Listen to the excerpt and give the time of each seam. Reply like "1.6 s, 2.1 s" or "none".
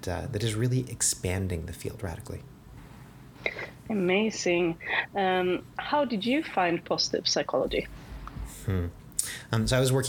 none

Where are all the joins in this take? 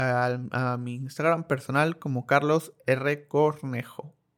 none

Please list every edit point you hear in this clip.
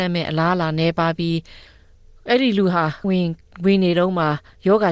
3.0 s

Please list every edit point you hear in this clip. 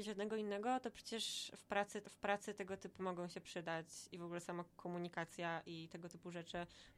2.0 s, 3.0 s

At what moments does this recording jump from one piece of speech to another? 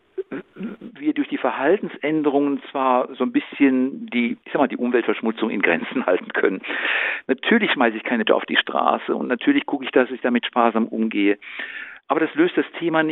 4.4 s, 8.3 s

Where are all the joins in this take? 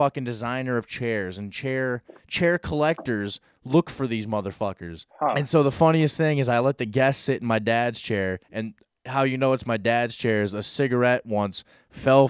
2.2 s, 5.1 s, 8.4 s

